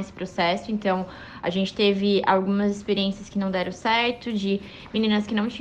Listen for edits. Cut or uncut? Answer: uncut